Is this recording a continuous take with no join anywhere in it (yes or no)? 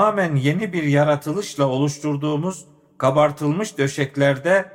yes